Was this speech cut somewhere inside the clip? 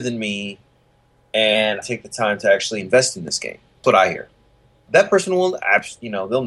yes; 2 cuts; at 1.8 s, 3.8 s

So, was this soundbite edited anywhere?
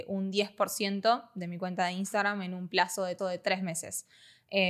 yes; 1 cut; at 3.2 s

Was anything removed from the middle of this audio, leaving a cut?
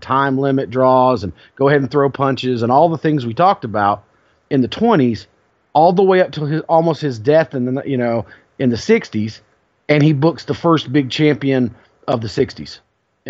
no; 0 cuts

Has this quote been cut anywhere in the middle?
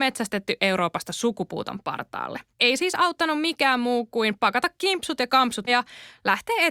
yes; 2 cuts; at 2.5 s, 5.7 s

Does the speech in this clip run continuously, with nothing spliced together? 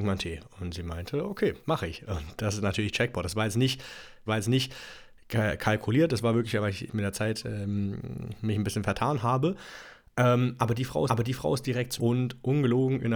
no; 5 cuts; at 1.6 s, 4.3 s, 6.9 s, 11.1 s, 12.0 s

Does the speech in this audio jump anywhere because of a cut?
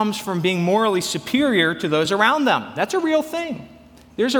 no; 0 cuts

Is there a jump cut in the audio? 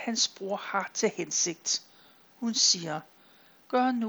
no; 0 cuts

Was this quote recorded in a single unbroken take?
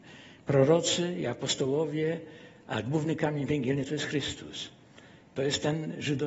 yes; 0 cuts

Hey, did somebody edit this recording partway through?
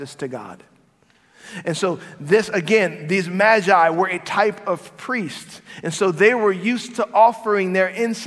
no; 0 cuts

